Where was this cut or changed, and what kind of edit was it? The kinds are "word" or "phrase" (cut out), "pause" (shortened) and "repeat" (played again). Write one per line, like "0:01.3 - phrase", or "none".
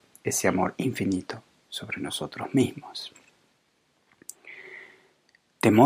none

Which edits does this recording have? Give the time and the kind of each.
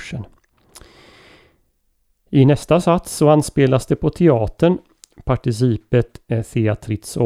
none

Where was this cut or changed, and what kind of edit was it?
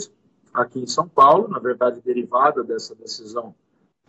none

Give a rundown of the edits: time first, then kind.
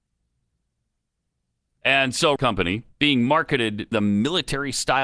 0:02.4 - phrase
0:02.9 - pause
0:03.9 - word

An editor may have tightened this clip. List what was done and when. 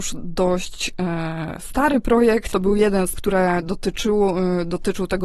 0:02.5 - word
0:03.1 - word

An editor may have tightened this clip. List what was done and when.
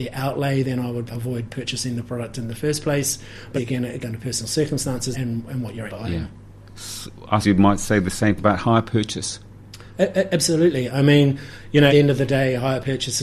0:01.1 - word
0:03.6 - word
0:04.0 - word
0:05.1 - word
0:05.9 - word
0:07.4 - word
0:08.4 - word
0:11.9 - word

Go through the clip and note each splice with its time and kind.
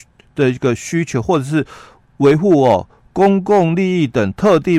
none

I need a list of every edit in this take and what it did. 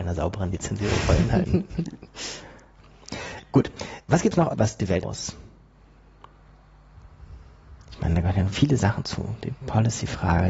0:03.4 - pause
0:04.5 - phrase
0:05.0 - word
0:08.5 - word

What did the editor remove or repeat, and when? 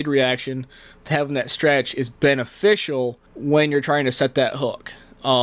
0:03.3 - pause

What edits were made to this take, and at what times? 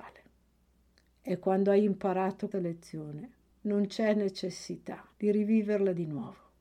0:01.0 - pause
0:02.5 - word
0:03.5 - pause
0:05.1 - pause

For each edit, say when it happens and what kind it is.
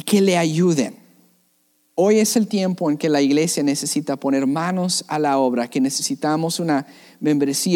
none

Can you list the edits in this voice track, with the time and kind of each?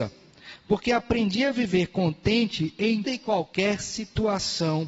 0:03.0 - word

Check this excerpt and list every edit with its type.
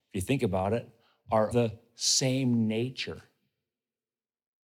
0:01.5 - word

